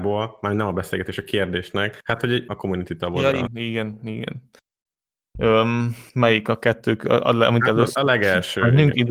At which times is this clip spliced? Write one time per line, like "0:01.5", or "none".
0:02.0
0:02.5
0:03.5
0:06.1